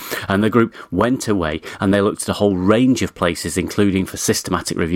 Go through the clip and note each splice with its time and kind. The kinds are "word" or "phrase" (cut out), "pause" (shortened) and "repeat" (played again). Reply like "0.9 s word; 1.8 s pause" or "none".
none